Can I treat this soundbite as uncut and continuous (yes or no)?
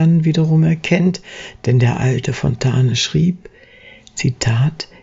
yes